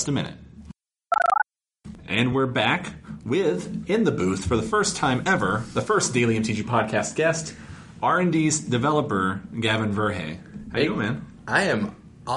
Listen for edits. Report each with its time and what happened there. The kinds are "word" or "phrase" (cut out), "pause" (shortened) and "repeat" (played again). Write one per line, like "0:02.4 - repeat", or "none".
none

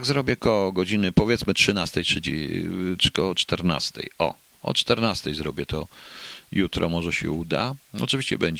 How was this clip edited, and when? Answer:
none

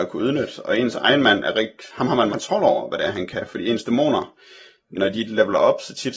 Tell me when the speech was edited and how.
0:02.3 - word
0:04.9 - word

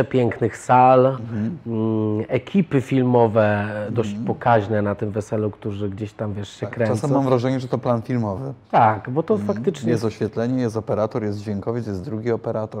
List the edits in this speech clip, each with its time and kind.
0:08.6 - pause

